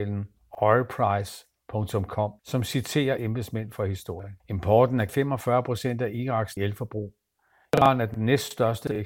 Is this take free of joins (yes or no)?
no